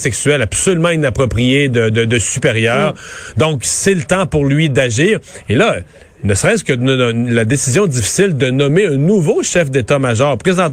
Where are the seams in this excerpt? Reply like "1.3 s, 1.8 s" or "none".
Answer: none